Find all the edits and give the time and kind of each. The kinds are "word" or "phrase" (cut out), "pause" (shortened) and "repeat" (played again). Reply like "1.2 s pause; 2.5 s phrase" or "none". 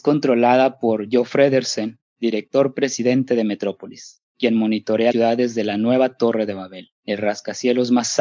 5.1 s word